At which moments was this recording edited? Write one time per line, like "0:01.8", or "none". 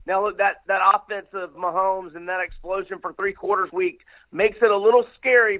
0:01.5
0:03.7